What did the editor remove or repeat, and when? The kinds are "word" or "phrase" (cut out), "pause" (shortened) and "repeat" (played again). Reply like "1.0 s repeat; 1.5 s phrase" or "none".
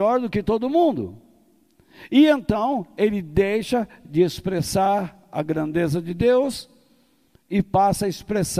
none